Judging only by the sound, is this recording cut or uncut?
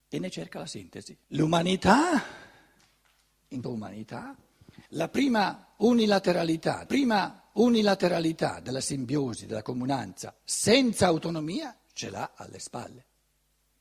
cut